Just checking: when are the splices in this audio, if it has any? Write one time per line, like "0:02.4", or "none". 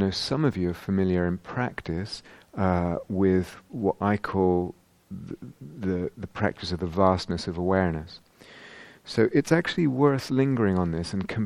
none

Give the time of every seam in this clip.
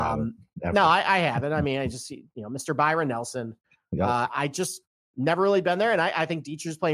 none

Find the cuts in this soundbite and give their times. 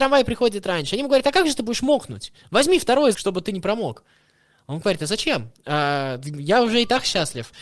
0:03.1

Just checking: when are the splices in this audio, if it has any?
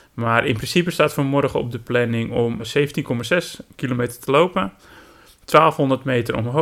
0:02.6

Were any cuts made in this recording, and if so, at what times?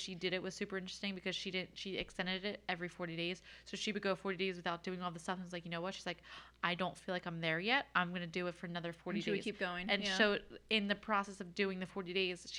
none

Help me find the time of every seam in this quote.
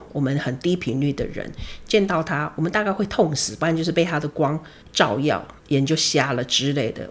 0:04.8
0:05.6

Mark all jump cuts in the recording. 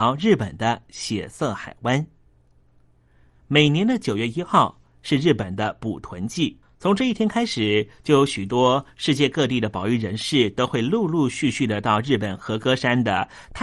none

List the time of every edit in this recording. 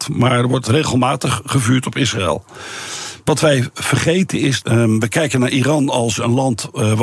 0:04.6

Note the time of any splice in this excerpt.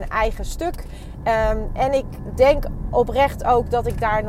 none

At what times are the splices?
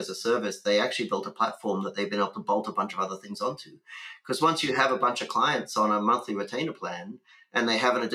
none

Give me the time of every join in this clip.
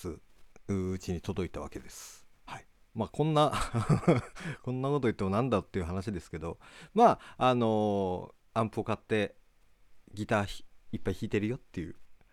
0:02.3
0:02.8

